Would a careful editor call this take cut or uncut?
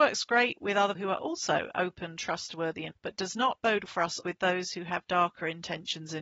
cut